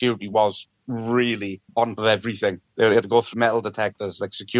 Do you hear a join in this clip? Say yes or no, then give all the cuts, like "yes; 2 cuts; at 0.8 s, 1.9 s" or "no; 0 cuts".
yes; 3 cuts; at 2.0 s, 2.7 s, 3.3 s